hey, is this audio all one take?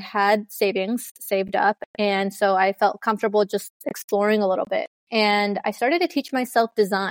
no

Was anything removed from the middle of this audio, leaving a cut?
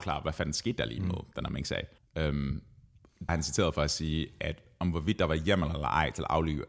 yes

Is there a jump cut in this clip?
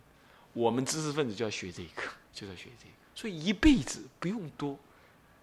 yes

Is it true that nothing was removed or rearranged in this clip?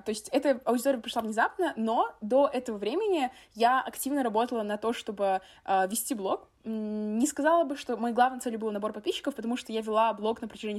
yes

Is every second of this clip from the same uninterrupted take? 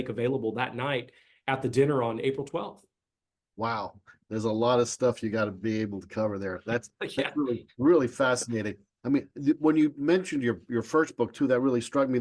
yes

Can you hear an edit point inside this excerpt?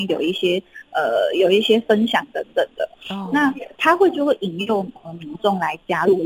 yes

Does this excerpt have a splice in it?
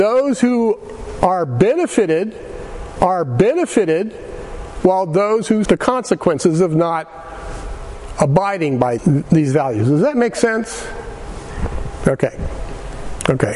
yes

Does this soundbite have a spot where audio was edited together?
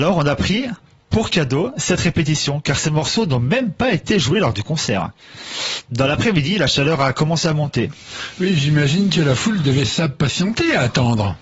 no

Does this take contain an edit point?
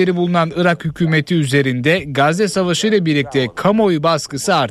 no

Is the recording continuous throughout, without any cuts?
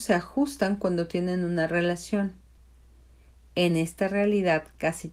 yes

